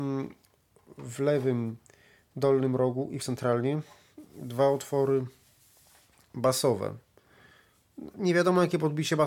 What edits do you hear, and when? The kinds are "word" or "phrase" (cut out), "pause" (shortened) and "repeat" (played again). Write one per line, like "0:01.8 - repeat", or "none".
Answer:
0:03.2 - phrase